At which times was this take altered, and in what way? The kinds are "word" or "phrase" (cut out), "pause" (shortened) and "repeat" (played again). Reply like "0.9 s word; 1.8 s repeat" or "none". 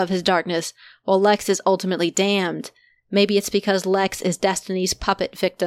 none

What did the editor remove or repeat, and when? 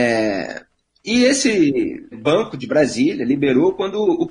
2.1 s word

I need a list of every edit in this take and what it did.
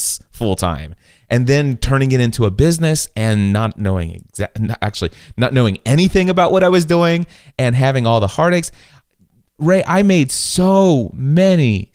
none

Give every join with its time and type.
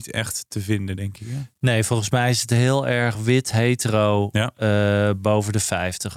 none

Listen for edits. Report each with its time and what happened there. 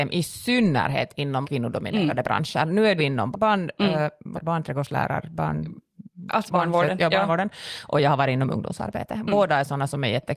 1.4 s word; 3.0 s word; 3.3 s word; 4.3 s word; 6.5 s phrase

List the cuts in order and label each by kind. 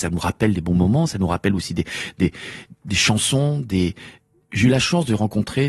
2.7 s word

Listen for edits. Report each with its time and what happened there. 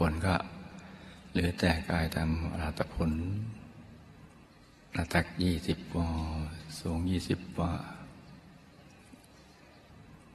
none

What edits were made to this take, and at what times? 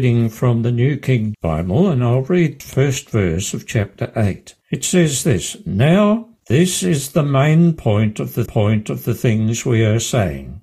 1.3 s word; 2.6 s word; 4.6 s pause; 6.4 s pause; 8.5 s repeat

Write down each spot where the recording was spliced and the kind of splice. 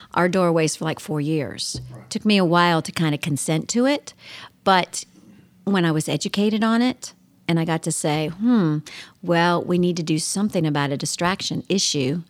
none

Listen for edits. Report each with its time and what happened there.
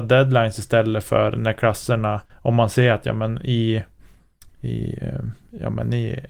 2.3 s pause

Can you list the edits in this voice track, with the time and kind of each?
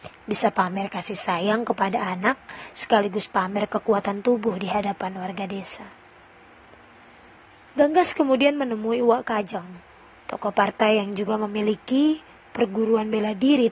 none

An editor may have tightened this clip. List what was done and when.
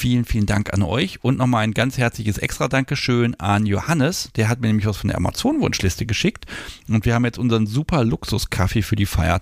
none

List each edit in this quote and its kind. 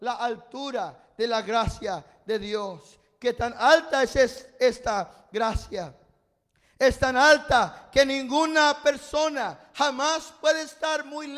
none

